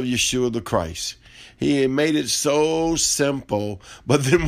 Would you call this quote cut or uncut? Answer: uncut